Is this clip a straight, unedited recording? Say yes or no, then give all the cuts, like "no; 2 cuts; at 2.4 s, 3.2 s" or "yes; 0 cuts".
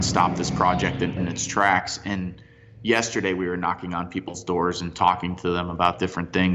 no; 1 cut; at 1.2 s